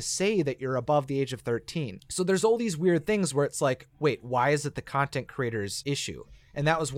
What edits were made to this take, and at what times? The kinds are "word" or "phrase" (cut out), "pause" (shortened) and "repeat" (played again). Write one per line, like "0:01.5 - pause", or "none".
none